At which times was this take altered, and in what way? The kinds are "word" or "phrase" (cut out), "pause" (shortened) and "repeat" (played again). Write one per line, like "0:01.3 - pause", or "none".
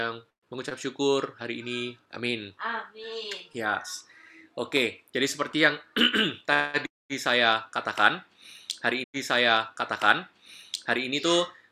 0:02.1 - word
0:09.0 - repeat